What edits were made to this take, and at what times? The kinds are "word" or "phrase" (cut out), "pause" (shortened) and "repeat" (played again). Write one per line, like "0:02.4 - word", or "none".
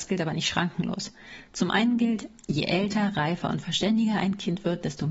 none

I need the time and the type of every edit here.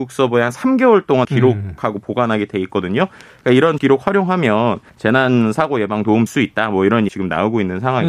0:01.2 - word
0:03.8 - word
0:04.9 - pause
0:06.3 - word
0:07.1 - word

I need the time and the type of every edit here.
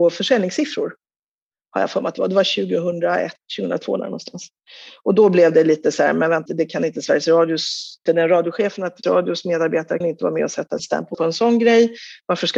0:06.5 - word
0:08.1 - word
0:09.0 - word
0:10.0 - word
0:10.8 - word
0:11.1 - word

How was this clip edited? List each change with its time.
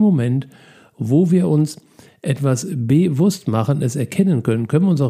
none

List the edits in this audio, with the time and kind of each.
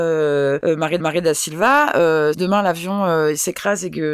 0:01.0 - repeat
0:02.3 - word

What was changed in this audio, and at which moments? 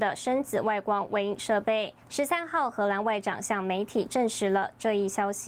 0:02.0 - pause

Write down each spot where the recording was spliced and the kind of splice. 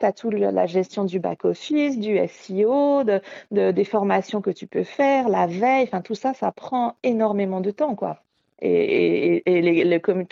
none

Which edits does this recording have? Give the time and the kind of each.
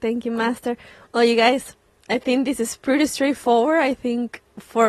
none

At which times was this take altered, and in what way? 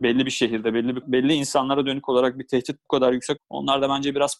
0:01.0 - word
0:03.4 - word

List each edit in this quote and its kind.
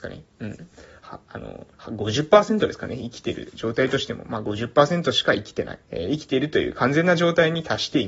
0:01.7 - pause
0:05.8 - pause

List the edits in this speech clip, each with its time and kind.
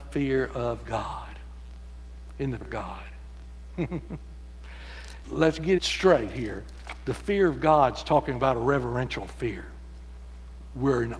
0:02.6 - word
0:05.2 - word
0:05.8 - word

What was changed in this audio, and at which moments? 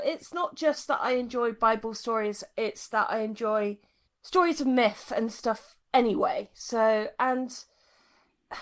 0:04.0 - pause

